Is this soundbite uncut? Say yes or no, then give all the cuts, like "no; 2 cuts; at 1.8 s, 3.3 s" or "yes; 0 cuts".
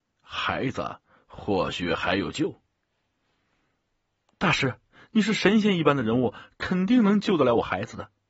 yes; 0 cuts